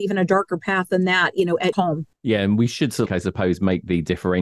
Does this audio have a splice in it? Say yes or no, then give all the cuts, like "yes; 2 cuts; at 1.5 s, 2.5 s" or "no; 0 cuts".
yes; 2 cuts; at 1.7 s, 3.1 s